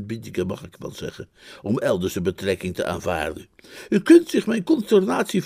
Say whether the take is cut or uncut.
uncut